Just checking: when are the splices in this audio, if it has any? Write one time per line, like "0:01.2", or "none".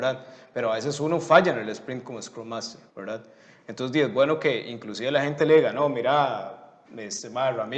0:02.9
0:06.9